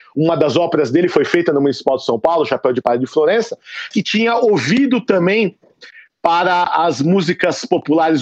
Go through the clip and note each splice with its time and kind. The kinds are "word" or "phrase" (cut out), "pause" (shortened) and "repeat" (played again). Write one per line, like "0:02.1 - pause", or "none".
0:03.9 - word